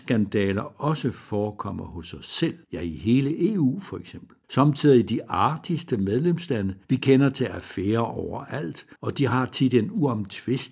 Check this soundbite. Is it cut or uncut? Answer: cut